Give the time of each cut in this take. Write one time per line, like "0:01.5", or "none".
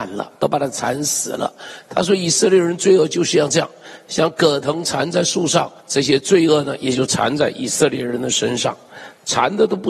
0:05.8

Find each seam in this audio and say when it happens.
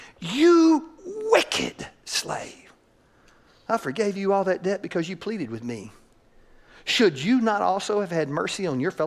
none

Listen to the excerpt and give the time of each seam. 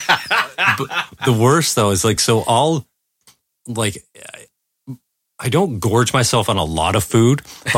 none

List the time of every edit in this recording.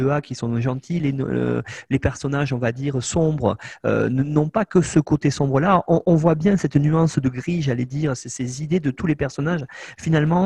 none

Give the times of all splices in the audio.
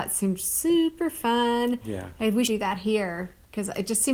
0:02.5

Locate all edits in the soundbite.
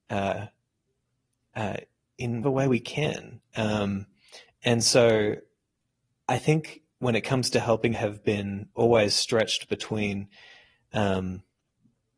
0:02.4
0:07.9

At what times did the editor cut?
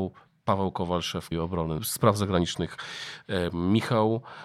0:01.3
0:01.8

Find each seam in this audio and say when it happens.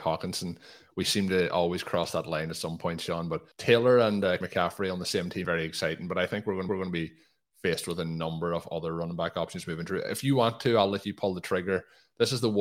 0:03.5
0:04.4
0:05.4
0:06.7

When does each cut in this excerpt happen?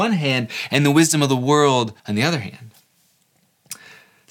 0:02.0

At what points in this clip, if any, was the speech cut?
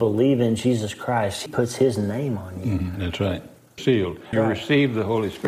0:01.5
0:03.8
0:04.3

